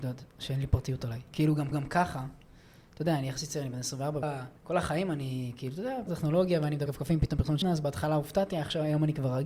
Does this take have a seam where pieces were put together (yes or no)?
yes